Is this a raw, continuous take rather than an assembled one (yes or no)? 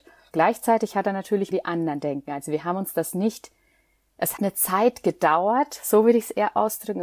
no